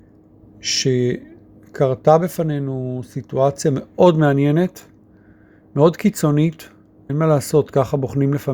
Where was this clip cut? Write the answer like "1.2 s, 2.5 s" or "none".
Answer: 7.1 s

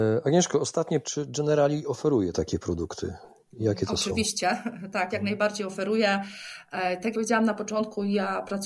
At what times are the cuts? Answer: 1.0 s, 5.1 s, 7.1 s

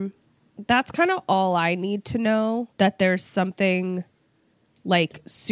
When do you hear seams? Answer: 2.7 s

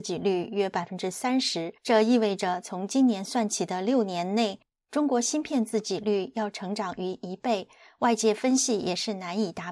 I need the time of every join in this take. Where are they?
1.8 s

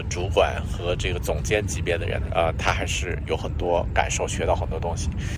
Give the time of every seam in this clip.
2.3 s

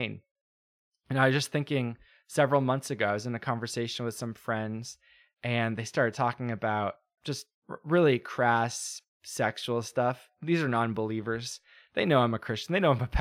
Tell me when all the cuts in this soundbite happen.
7.2 s

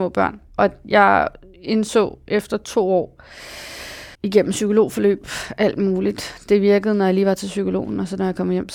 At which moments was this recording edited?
4.1 s

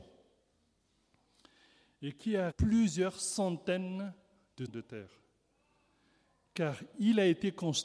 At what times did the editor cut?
2.5 s, 4.7 s

